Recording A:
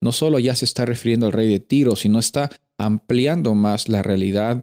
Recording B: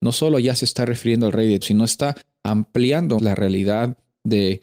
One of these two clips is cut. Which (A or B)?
B